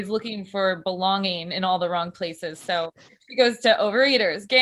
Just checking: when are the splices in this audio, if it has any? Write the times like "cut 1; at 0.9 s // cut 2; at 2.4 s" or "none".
none